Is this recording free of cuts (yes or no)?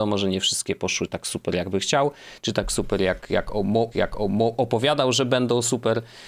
no